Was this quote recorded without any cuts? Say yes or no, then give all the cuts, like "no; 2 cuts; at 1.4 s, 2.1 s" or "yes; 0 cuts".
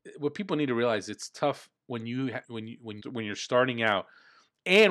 no; 3 cuts; at 1.8 s, 2.4 s, 3.0 s